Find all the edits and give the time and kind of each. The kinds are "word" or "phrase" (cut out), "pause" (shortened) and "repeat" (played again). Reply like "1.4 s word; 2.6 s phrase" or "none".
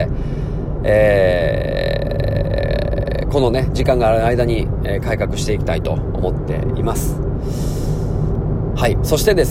none